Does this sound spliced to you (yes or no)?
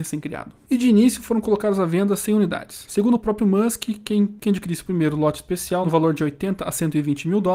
no